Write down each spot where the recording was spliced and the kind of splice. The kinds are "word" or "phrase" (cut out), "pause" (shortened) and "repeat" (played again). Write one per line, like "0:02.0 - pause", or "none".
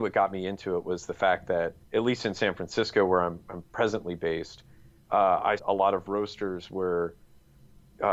0:01.8 - pause
0:05.6 - phrase

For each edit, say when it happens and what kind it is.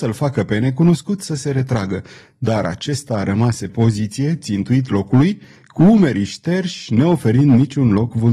0:03.7 - word

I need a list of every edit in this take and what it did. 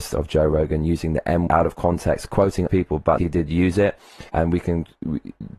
0:01.5 - word
0:02.7 - word
0:03.2 - word
0:04.3 - pause

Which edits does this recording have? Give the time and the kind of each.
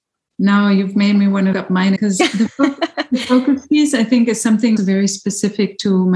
0:01.5 - word
0:02.0 - word
0:04.8 - word

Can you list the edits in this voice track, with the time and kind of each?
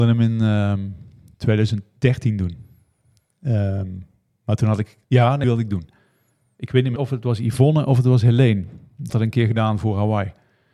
0:05.0 - pause
0:05.4 - word
0:07.0 - word
0:09.1 - word

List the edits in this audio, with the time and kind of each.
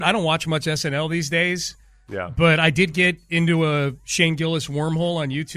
none

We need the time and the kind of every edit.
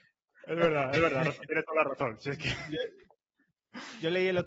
none

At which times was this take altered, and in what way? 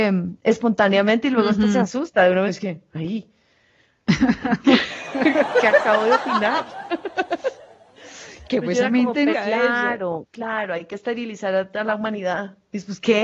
0:02.5 - word
0:09.3 - word

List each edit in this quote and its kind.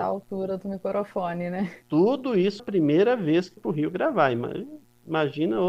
0:01.8 - pause
0:02.6 - word
0:03.6 - word

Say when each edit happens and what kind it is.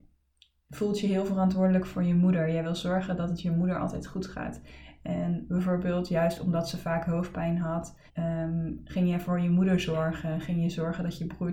0:08.1 - pause

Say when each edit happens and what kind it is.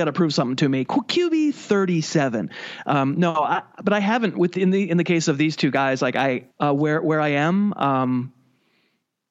0:06.5 - phrase

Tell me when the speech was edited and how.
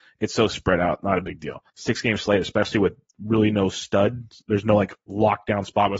0:01.7 - pause

